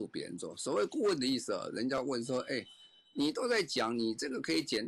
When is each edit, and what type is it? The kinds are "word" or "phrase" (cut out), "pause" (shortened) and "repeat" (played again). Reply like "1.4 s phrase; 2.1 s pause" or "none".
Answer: none